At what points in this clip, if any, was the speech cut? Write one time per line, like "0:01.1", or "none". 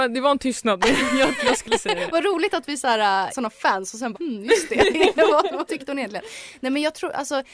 0:01.4
0:03.3
0:04.1
0:05.7